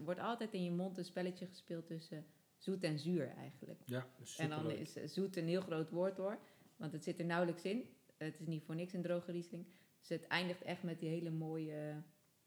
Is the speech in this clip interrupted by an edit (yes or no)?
no